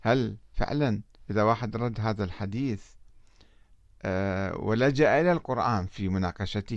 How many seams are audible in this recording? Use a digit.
1